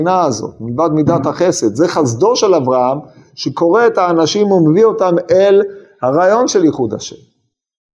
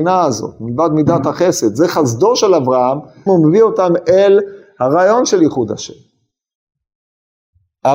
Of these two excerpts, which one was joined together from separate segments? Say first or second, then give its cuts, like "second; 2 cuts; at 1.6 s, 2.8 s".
second; 1 cut; at 3.3 s